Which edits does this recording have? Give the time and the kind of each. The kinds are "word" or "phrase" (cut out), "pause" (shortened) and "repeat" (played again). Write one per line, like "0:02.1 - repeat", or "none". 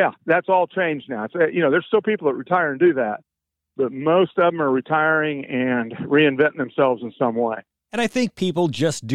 none